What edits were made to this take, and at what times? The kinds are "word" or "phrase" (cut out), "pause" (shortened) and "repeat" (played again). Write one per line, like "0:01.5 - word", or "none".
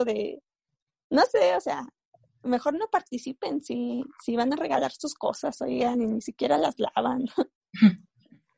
none